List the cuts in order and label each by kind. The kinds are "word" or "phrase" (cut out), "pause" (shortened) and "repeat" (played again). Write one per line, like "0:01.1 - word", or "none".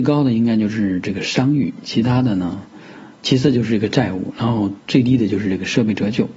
0:04.8 - pause